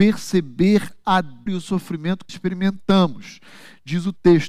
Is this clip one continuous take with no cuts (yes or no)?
no